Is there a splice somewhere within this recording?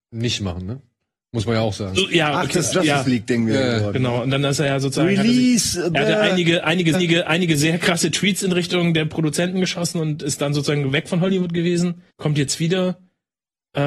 yes; 3 cuts; at 2.7 s, 6.9 s, 12.1 s

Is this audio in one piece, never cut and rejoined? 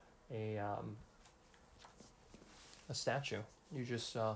yes; 0 cuts

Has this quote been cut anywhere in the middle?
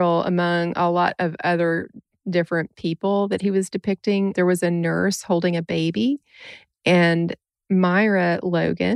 no; 0 cuts

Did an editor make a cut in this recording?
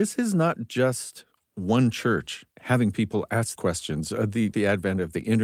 yes; 3 cuts; at 2.5 s, 3.6 s, 4.5 s

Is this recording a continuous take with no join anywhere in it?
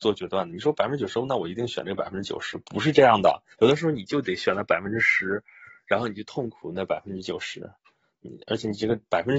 no; 1 cut; at 3.5 s

